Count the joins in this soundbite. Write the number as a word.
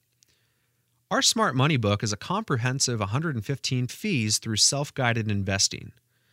one